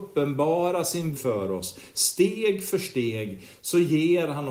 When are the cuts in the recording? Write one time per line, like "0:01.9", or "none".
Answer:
0:01.2